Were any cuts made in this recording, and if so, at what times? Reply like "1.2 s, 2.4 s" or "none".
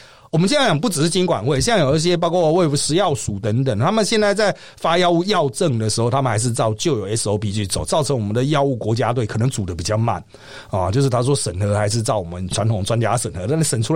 none